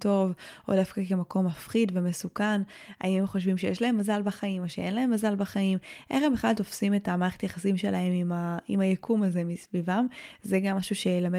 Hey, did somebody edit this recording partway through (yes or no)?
no